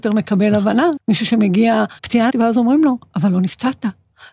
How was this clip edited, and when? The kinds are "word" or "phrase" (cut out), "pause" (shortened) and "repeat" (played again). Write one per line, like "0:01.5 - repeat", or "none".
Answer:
0:01.0 - word
0:02.0 - word
0:02.3 - word